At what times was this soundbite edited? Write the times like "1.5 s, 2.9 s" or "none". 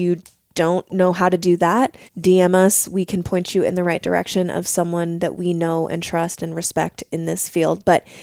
2.1 s